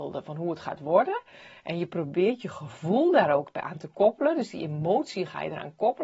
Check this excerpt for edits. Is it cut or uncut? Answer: uncut